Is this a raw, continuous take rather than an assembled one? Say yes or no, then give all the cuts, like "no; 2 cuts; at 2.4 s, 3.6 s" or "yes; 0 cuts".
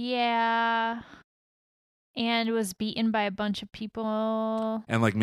yes; 0 cuts